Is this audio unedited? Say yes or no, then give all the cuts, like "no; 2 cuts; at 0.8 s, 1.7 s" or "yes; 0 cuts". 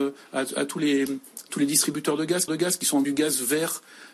no; 2 cuts; at 2.5 s, 3.0 s